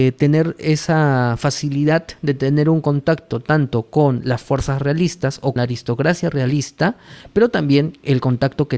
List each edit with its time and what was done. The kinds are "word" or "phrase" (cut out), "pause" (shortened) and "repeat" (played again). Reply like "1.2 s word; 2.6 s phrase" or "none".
5.6 s word